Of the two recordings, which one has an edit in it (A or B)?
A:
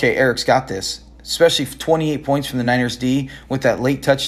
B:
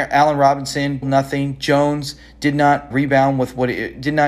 B